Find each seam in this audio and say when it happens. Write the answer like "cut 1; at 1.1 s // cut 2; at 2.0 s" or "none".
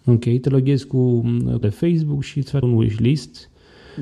cut 1; at 1.6 s // cut 2; at 2.6 s